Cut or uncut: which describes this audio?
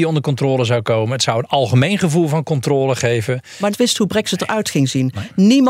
cut